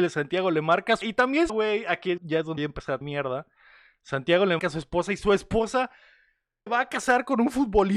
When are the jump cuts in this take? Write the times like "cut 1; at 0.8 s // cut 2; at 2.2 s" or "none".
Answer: cut 1; at 1.0 s // cut 2; at 1.5 s // cut 3; at 2.2 s // cut 4; at 2.6 s // cut 5; at 3.0 s // cut 6; at 4.6 s // cut 7; at 6.7 s